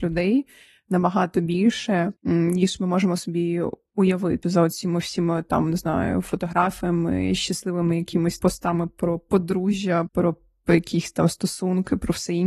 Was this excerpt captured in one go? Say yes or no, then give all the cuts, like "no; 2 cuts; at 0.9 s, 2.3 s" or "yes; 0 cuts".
no; 4 cuts; at 2.2 s, 4.4 s, 8.4 s, 10.1 s